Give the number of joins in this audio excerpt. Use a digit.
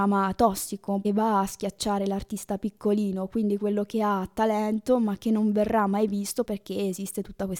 2